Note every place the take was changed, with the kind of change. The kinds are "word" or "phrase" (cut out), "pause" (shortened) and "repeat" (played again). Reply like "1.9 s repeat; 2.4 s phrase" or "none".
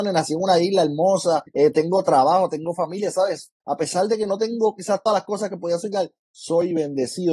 1.5 s pause; 3.6 s pause; 5.1 s word